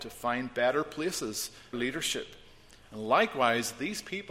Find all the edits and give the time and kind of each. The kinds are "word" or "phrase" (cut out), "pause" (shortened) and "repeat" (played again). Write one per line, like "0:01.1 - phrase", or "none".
0:01.7 - phrase